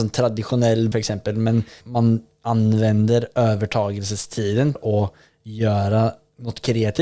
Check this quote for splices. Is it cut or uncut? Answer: cut